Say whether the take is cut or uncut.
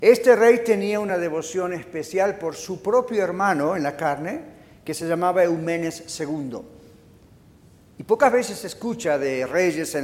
uncut